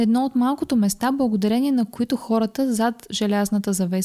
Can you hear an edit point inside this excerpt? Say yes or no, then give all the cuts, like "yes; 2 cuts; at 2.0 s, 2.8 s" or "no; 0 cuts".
no; 0 cuts